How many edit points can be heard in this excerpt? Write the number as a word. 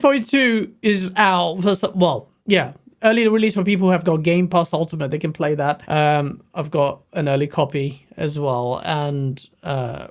two